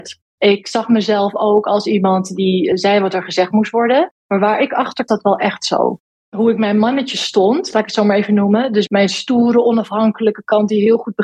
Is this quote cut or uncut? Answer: cut